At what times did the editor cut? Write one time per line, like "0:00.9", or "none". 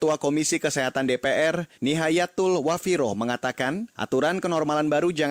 0:01.7
0:03.9